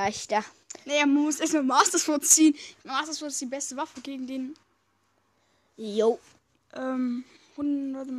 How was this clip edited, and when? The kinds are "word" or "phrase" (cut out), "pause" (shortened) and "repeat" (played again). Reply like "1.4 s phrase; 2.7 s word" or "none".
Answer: none